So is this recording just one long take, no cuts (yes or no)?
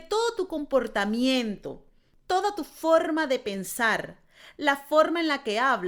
yes